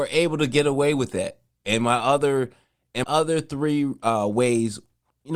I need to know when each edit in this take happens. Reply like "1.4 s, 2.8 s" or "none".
3.0 s